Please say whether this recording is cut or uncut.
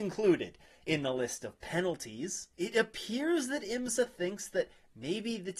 uncut